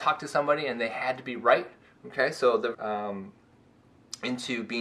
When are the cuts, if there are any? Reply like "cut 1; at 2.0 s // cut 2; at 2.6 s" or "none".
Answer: cut 1; at 2.7 s